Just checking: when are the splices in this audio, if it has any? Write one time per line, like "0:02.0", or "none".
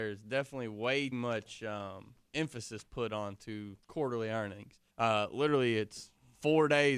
0:01.1
0:03.8
0:04.9